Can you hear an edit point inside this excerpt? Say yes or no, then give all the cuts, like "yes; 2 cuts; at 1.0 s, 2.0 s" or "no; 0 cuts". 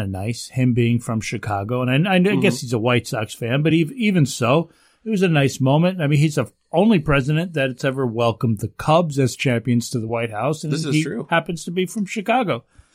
no; 0 cuts